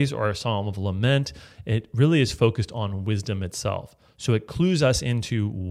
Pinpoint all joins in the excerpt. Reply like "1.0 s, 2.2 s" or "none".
none